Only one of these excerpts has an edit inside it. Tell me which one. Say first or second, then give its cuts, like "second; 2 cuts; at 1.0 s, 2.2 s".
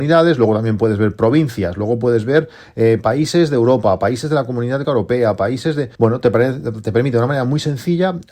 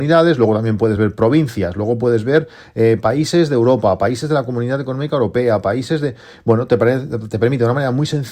first; 2 cuts; at 4.8 s, 5.9 s